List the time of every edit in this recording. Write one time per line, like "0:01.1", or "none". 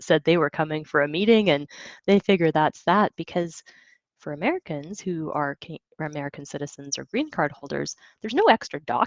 none